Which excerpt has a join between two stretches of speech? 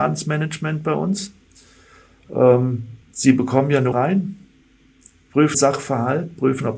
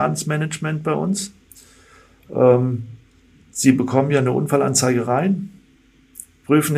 first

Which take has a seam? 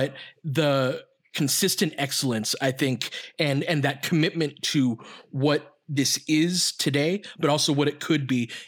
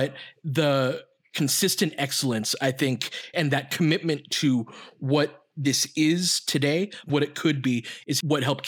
second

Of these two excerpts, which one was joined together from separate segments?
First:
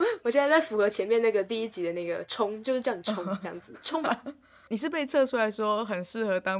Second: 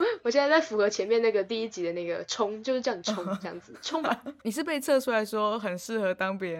second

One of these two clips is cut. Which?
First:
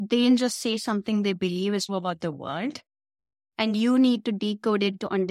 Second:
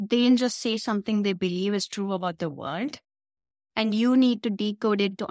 first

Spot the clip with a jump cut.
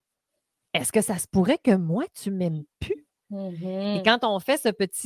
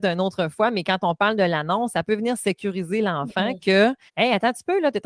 second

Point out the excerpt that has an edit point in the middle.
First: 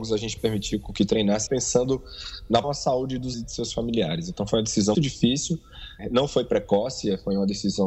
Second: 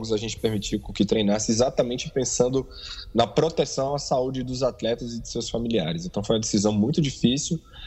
first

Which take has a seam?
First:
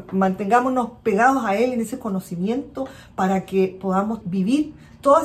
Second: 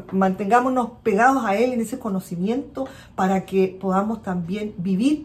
first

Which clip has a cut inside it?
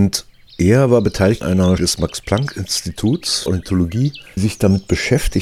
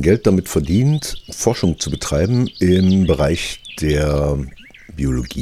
first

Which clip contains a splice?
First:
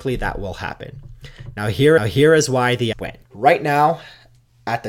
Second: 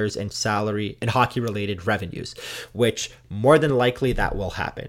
first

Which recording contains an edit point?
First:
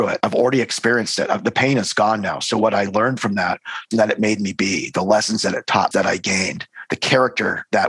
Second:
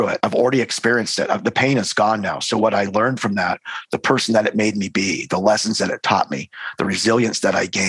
first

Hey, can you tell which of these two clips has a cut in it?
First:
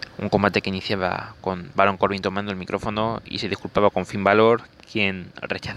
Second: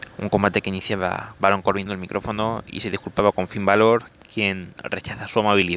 second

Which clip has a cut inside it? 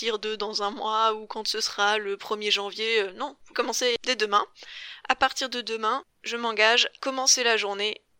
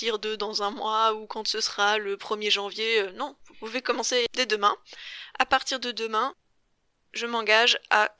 first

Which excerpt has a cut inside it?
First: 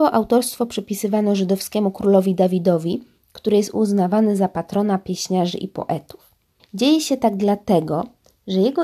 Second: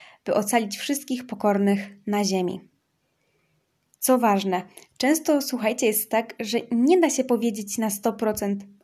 first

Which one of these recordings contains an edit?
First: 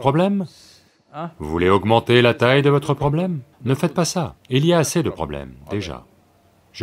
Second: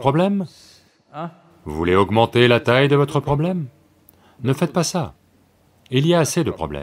first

